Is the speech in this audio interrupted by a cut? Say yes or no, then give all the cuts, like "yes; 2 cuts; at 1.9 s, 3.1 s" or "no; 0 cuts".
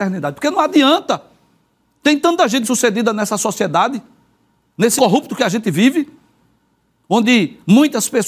yes; 2 cuts; at 2.6 s, 5.0 s